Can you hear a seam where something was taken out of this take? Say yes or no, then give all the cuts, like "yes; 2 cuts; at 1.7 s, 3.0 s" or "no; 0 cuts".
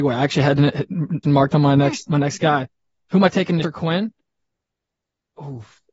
yes; 3 cuts; at 1.2 s, 2.1 s, 3.6 s